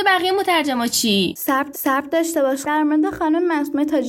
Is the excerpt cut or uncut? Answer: cut